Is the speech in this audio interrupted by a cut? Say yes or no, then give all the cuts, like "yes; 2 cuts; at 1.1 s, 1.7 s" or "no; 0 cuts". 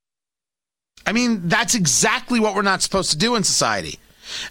no; 0 cuts